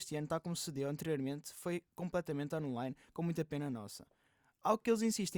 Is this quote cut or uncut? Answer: uncut